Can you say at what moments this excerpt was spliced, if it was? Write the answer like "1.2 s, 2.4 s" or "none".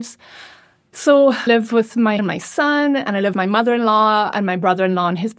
1.5 s, 2.2 s, 3.3 s